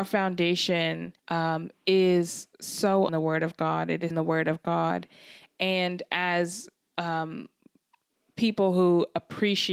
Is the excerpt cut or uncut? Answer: cut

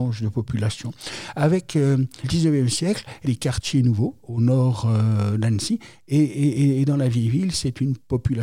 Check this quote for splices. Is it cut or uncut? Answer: cut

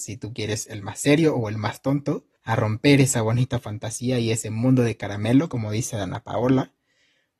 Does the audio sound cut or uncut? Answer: cut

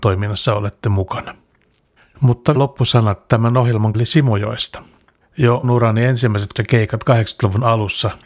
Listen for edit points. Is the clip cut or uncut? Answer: cut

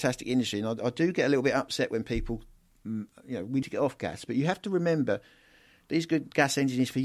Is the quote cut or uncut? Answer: cut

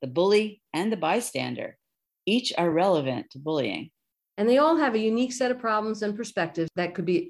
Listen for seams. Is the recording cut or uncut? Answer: uncut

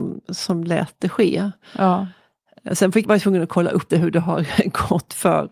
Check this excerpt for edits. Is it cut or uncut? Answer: cut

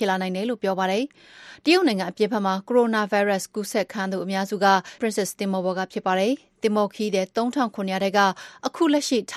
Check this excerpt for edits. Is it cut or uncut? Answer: cut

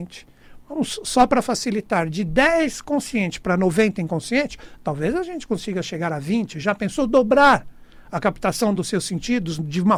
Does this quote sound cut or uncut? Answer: uncut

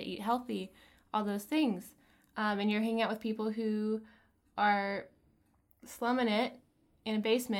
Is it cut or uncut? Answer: uncut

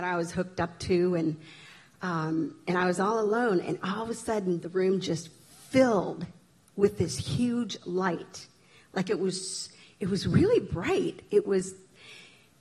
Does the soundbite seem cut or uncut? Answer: uncut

